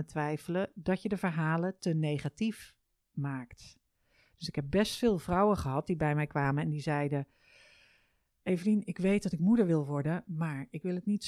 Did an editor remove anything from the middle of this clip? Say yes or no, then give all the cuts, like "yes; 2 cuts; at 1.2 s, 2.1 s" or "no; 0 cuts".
no; 0 cuts